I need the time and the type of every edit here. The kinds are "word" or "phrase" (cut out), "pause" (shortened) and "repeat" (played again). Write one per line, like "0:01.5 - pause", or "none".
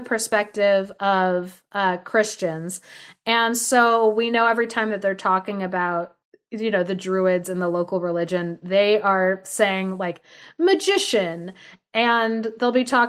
none